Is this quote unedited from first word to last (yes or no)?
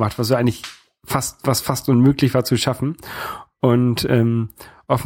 yes